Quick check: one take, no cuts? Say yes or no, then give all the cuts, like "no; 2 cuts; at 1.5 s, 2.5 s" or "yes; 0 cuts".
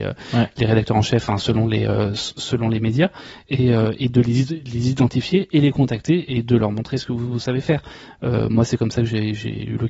yes; 0 cuts